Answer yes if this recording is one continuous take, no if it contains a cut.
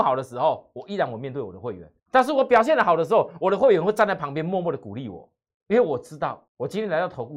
no